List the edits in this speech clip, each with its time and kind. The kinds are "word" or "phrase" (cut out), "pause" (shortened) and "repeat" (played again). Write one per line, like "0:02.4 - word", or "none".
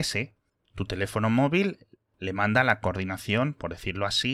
none